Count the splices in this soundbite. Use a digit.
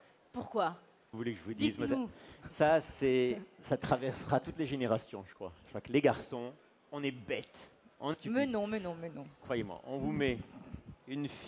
2